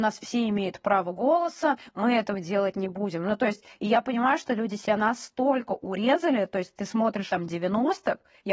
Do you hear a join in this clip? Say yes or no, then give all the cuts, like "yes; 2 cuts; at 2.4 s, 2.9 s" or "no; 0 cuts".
yes; 1 cut; at 7.3 s